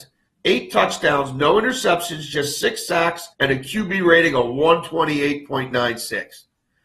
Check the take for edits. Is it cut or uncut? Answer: cut